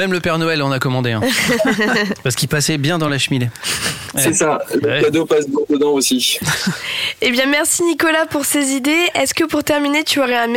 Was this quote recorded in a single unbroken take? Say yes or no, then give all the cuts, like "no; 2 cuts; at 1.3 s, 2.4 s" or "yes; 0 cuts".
yes; 0 cuts